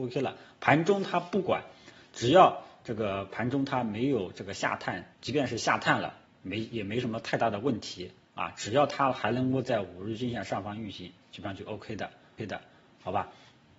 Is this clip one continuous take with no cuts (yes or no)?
no